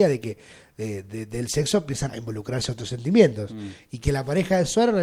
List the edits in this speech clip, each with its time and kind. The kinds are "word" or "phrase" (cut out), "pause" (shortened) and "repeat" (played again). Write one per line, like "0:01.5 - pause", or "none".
0:02.1 - word

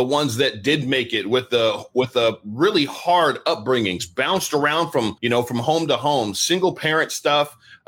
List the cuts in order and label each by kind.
0:05.2 - pause

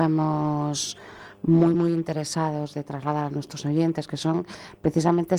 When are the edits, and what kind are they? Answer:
none

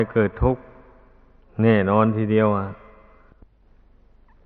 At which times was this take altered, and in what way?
none

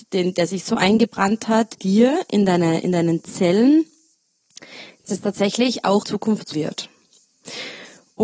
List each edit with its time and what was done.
0:01.8 - word
0:05.0 - phrase
0:06.0 - word
0:06.5 - word

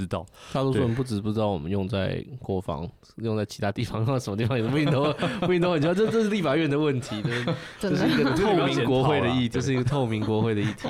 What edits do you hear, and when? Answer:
0:09.5 - word

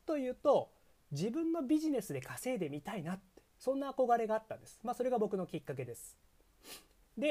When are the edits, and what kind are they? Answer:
0:03.5 - pause

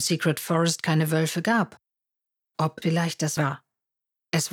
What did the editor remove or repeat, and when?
0:02.8 - word
0:03.4 - phrase

